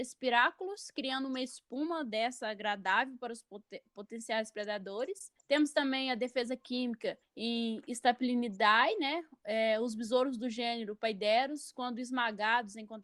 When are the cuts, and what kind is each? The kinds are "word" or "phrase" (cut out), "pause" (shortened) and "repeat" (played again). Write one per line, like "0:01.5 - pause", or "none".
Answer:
0:05.4 - pause
0:07.2 - pause